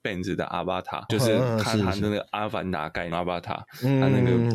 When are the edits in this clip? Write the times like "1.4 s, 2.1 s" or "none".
1.1 s, 3.1 s